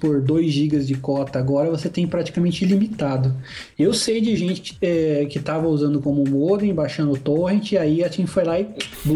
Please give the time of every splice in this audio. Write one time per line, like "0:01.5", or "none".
none